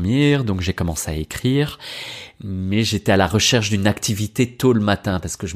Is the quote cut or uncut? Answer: uncut